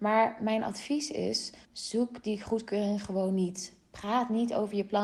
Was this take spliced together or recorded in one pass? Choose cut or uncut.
cut